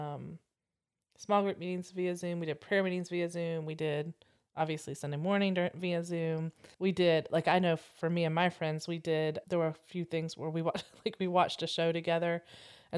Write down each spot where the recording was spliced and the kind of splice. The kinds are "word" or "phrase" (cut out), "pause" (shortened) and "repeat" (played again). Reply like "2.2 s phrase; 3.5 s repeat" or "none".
6.7 s pause; 9.4 s word